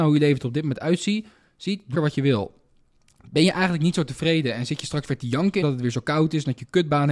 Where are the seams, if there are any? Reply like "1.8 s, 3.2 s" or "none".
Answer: 1.9 s, 5.6 s